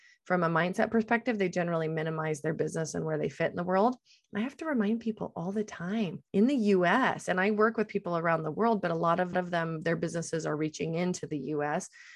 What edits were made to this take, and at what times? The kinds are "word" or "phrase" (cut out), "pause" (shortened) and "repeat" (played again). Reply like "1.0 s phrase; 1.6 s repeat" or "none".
6.3 s pause; 9.3 s repeat